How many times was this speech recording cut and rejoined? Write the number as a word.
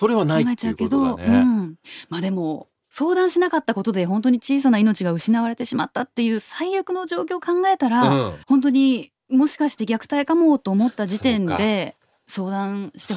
one